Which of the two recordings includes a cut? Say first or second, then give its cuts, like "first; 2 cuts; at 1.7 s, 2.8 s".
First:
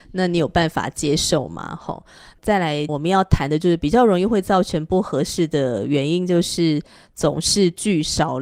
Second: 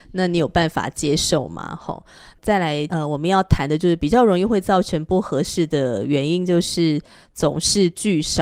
first; 1 cut; at 2.9 s